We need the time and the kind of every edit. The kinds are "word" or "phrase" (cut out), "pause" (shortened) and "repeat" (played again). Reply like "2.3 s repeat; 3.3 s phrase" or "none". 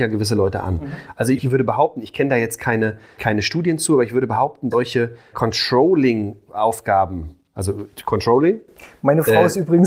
1.4 s word; 3.2 s word; 4.7 s word; 5.3 s word